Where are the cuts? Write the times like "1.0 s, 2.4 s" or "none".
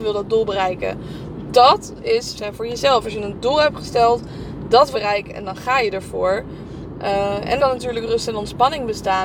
2.3 s, 4.9 s, 7.6 s